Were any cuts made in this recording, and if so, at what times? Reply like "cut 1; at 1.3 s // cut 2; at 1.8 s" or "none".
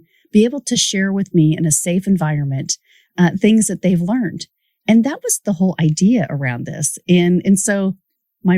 none